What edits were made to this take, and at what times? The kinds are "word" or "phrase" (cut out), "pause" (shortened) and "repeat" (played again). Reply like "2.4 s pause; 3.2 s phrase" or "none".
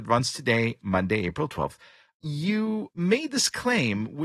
none